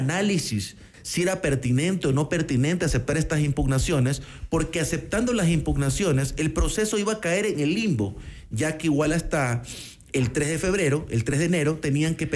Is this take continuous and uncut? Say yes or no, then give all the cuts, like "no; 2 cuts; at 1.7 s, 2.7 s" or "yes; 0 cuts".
yes; 0 cuts